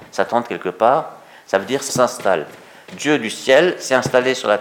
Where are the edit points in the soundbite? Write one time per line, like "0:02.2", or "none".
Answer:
0:01.9